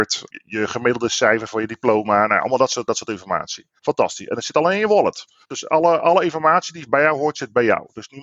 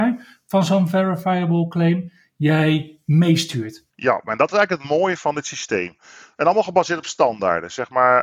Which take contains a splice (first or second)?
first